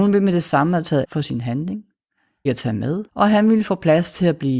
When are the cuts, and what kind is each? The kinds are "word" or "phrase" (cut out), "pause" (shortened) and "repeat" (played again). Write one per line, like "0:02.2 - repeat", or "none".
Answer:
0:01.0 - word
0:02.5 - word
0:03.1 - pause